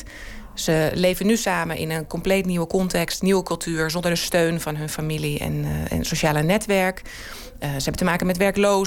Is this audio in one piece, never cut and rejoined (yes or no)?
yes